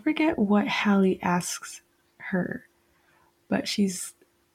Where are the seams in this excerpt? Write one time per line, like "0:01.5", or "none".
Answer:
none